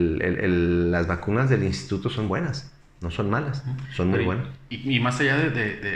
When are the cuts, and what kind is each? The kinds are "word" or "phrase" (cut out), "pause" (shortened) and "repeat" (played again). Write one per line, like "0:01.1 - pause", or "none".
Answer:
none